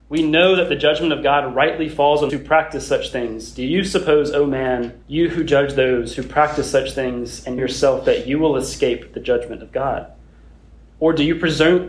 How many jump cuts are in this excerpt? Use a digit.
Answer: 3